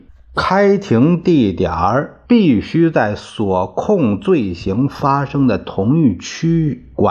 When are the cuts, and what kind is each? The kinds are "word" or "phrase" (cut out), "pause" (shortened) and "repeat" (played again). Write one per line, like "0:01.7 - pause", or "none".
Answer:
0:02.2 - pause